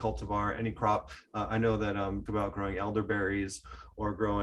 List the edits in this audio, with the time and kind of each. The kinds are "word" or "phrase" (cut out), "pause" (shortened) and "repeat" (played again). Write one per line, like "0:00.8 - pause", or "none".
0:02.3 - phrase